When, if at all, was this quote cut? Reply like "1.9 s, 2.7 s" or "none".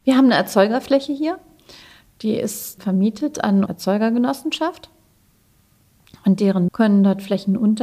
2.8 s, 3.7 s, 6.7 s

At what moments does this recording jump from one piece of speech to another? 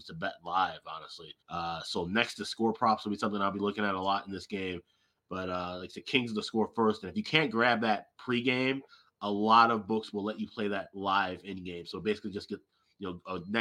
1.4 s

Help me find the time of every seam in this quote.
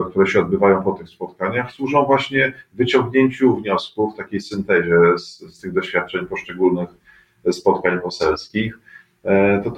none

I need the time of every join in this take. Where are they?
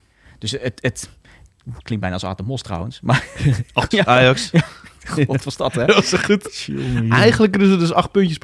3.9 s, 5.4 s

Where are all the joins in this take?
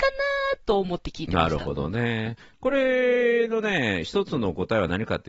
none

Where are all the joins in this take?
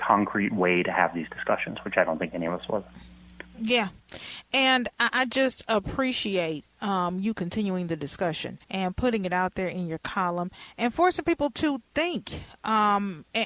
8.6 s

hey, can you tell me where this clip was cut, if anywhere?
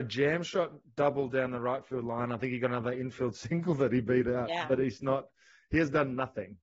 none

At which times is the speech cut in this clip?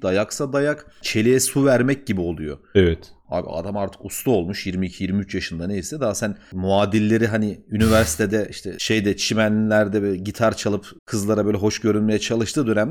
11.0 s

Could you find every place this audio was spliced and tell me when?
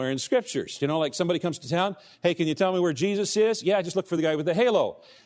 none

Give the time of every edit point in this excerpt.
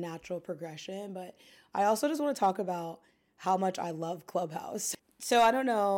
none

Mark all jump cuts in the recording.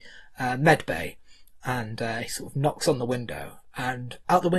2.3 s

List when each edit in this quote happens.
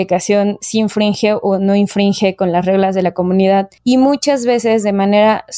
none

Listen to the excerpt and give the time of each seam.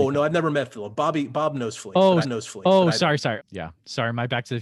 2.2 s, 3.4 s

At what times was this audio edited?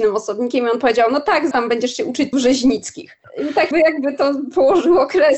1.5 s, 2.3 s, 3.7 s

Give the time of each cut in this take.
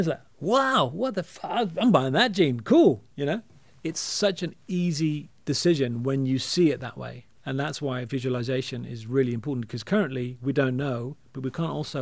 3.1 s, 5.4 s

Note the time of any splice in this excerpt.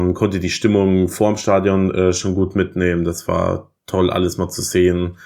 none

